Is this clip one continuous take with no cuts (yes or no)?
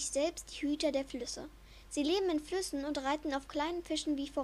yes